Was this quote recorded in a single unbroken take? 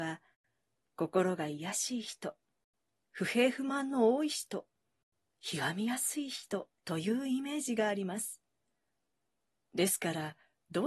no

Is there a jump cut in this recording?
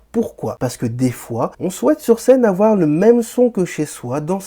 yes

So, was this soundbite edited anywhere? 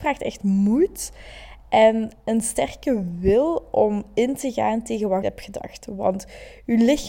yes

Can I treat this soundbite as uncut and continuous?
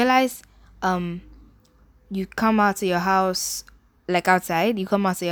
yes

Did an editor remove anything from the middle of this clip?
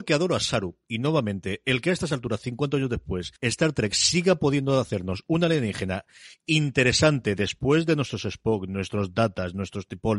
yes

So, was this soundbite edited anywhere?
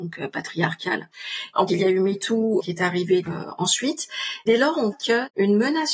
yes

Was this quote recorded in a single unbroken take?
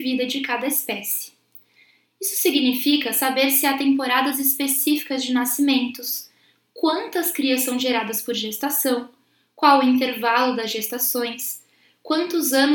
yes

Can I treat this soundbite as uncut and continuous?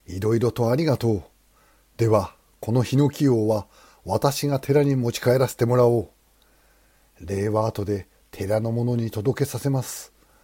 yes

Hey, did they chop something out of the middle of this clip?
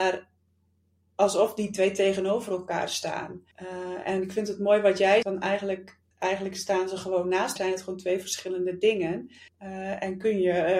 yes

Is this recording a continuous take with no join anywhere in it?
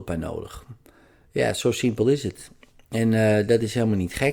yes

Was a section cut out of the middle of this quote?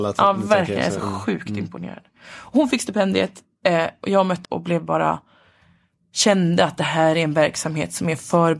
yes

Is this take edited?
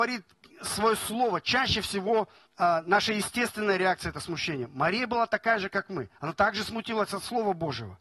yes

